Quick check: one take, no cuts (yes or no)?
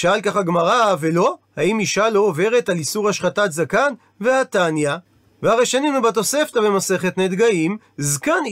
yes